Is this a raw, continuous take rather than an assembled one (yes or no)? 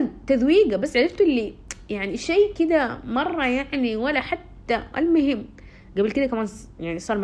yes